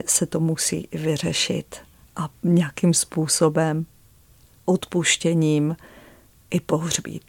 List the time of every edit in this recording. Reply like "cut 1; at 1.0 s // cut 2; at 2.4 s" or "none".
none